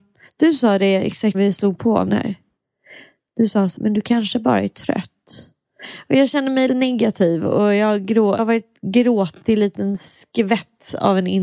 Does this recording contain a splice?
yes; 5 cuts; at 1.3 s, 2.1 s, 3.8 s, 6.7 s, 8.4 s

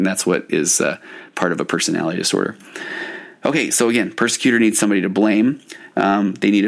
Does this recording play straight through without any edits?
yes; 0 cuts

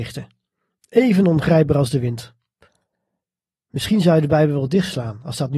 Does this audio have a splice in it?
no; 0 cuts

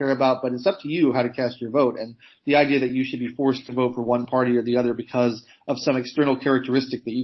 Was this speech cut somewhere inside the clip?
no; 0 cuts

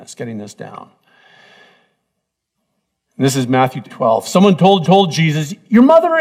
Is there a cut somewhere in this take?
yes; 2 cuts; at 3.9 s, 4.8 s

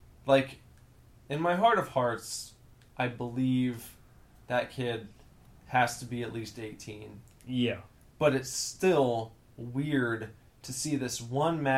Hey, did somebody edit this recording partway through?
no; 0 cuts

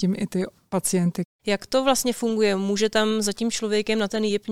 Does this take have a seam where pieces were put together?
no; 0 cuts

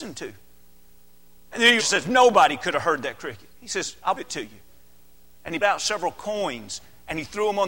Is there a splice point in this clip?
yes; 4 cuts; at 1.8 s, 3.5 s, 4.2 s, 5.6 s

